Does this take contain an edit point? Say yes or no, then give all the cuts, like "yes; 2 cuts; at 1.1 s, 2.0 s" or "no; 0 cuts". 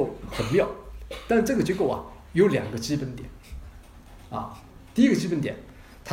no; 0 cuts